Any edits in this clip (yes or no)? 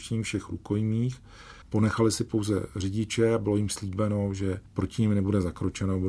yes